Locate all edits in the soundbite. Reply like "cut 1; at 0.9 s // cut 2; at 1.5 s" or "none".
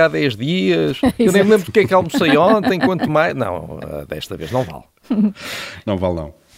none